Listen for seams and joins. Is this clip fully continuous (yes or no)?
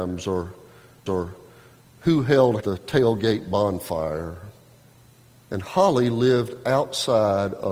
no